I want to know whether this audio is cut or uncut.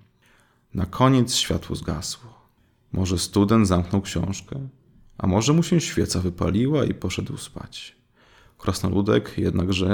uncut